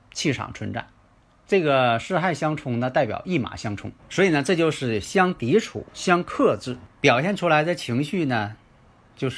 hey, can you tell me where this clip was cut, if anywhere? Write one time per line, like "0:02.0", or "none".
0:01.2
0:04.0
0:05.9
0:06.9